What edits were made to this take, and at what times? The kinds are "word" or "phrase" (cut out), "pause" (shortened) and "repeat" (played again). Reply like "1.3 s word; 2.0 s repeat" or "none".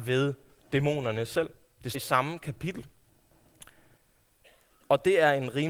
1.9 s word